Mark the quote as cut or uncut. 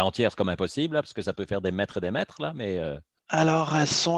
uncut